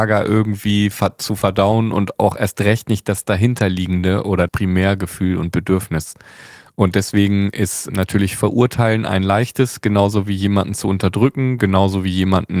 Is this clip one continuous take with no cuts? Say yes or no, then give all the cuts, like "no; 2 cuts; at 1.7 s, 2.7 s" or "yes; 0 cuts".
no; 2 cuts; at 4.5 s, 7.9 s